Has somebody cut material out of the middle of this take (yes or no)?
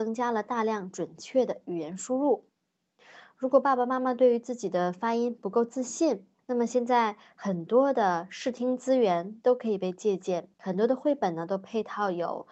yes